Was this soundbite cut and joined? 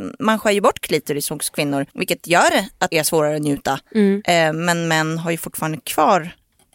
yes; 2 cuts; at 1.9 s, 2.9 s

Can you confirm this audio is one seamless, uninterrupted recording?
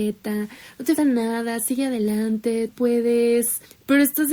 no; 2 cuts; at 1.0 s, 2.7 s

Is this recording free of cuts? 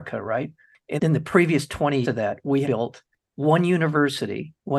no; 3 cuts; at 1.0 s, 2.0 s, 2.6 s

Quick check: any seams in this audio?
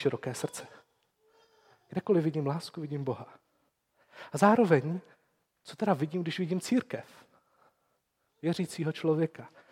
no; 0 cuts

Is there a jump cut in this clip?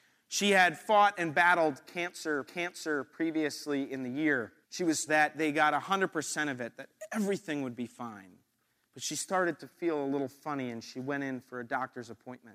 yes; 4 cuts; at 2.4 s, 4.6 s, 5.1 s, 8.6 s

